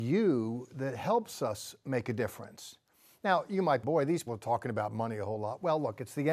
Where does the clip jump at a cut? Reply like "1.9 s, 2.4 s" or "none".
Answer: 3.8 s, 4.3 s